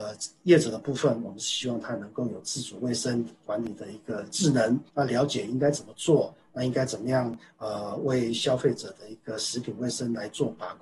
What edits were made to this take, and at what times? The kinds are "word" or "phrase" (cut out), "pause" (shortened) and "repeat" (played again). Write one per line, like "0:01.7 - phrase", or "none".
0:04.9 - pause